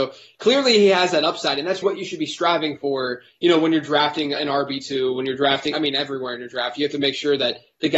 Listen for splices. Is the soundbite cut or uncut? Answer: cut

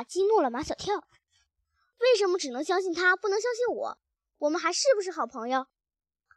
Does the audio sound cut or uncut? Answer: uncut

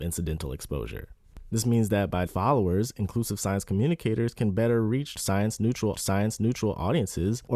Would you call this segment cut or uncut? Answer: cut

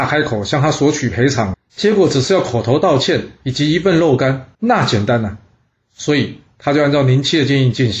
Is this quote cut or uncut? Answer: cut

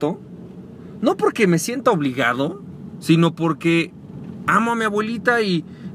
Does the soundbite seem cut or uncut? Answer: uncut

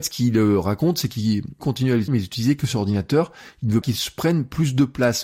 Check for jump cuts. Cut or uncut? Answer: cut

